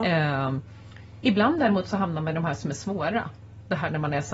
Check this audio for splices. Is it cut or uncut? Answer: uncut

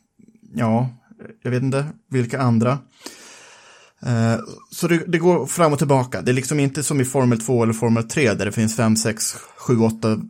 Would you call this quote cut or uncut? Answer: uncut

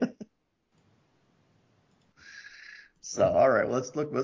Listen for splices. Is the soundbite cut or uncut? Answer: uncut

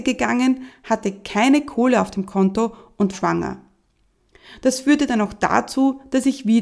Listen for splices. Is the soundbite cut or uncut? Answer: cut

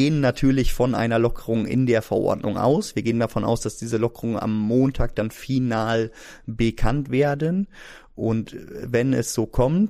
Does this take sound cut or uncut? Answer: uncut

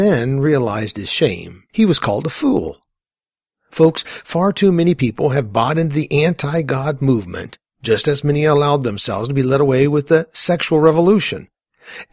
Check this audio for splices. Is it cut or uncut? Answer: cut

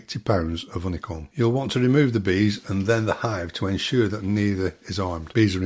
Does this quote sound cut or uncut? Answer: uncut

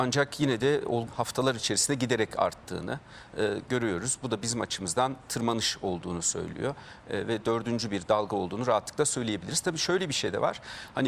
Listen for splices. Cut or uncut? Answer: cut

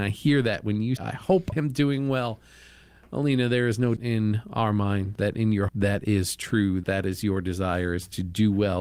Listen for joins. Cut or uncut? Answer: cut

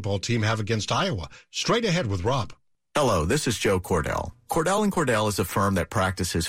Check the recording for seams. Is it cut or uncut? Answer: uncut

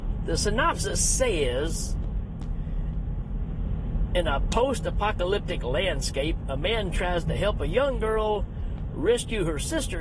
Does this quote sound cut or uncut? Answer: uncut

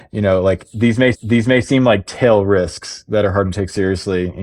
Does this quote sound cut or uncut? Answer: cut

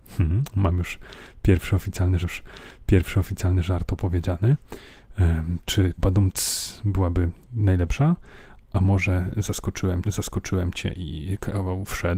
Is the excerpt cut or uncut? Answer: cut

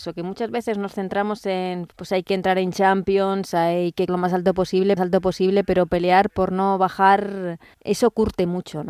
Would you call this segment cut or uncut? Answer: cut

